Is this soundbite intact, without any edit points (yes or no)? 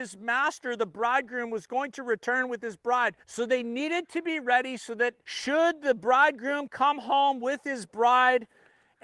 no